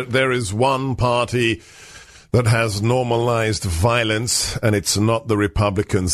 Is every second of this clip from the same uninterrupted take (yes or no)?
yes